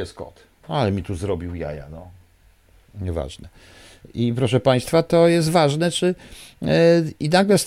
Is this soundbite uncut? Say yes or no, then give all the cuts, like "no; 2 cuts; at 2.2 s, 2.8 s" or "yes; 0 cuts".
yes; 0 cuts